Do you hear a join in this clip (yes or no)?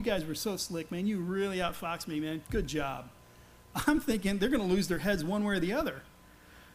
yes